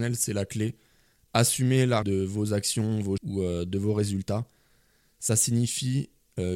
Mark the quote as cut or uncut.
cut